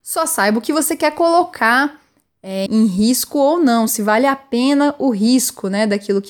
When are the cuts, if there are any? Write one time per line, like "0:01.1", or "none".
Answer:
0:02.7